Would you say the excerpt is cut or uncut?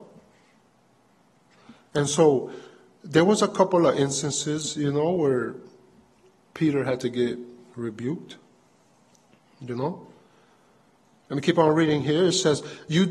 uncut